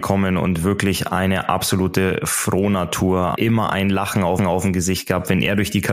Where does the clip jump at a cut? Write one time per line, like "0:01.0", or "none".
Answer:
0:03.4
0:04.4